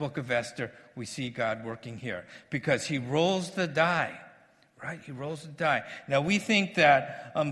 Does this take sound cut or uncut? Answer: uncut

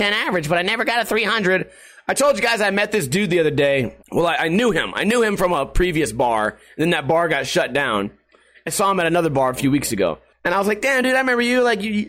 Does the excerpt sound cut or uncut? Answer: cut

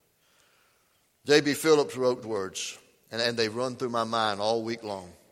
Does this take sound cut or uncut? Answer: cut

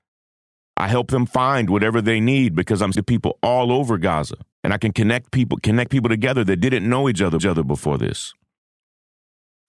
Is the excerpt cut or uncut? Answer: cut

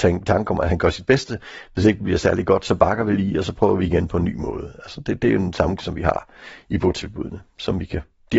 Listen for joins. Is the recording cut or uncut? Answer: cut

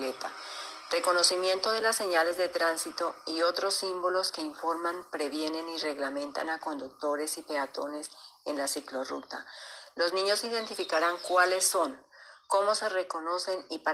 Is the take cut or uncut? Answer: uncut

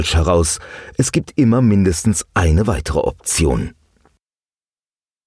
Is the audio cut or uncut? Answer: uncut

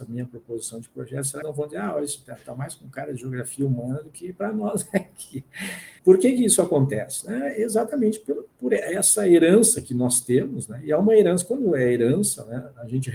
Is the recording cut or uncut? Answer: cut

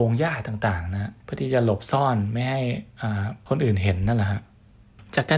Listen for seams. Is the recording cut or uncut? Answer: cut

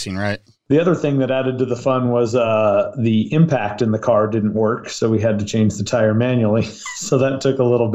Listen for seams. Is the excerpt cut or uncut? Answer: uncut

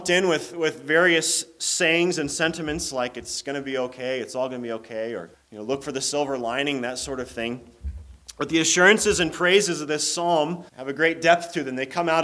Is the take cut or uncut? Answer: cut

